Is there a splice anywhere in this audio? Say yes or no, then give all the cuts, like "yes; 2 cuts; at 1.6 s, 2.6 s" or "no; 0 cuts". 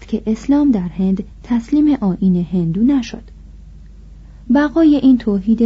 no; 0 cuts